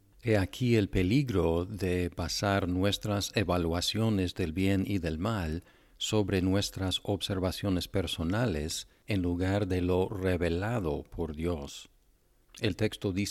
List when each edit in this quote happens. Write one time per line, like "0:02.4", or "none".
none

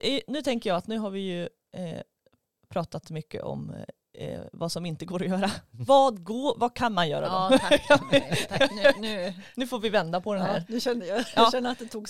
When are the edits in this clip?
none

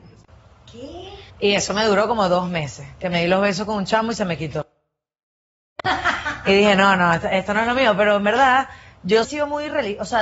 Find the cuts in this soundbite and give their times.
0:01.3
0:09.2

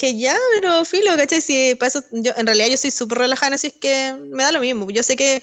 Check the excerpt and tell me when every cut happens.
0:03.6

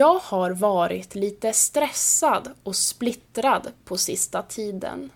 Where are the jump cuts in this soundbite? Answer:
none

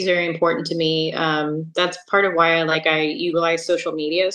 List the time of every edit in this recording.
none

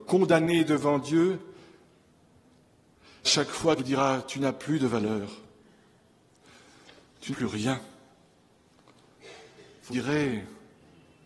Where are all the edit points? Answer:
0:03.2
0:03.8
0:07.3
0:09.9

